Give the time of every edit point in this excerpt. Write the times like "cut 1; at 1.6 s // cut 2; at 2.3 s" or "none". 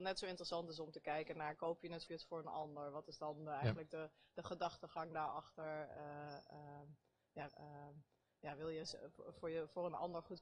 cut 1; at 2.1 s // cut 2; at 7.5 s